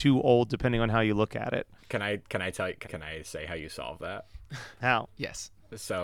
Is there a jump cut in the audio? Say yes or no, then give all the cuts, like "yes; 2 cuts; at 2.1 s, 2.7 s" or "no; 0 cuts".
yes; 2 cuts; at 1.8 s, 2.8 s